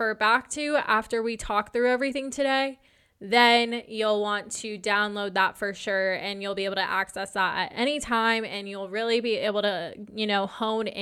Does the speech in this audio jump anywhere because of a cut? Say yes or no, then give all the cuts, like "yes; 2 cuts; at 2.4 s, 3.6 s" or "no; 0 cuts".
no; 0 cuts